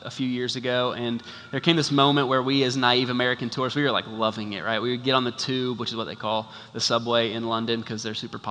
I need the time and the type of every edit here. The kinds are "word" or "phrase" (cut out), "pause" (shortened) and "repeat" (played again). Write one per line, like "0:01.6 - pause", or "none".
none